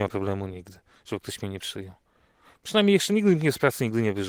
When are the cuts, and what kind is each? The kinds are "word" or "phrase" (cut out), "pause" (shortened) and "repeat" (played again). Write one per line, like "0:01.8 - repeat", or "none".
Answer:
none